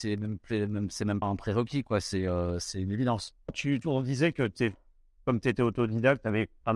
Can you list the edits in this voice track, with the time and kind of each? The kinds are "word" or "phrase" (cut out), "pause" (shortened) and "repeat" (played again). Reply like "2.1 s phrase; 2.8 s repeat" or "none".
1.2 s word